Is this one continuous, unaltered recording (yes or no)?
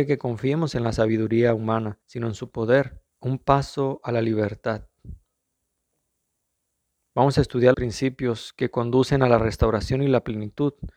no